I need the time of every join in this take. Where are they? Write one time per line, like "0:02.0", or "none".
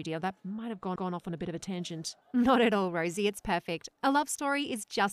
0:01.0
0:02.2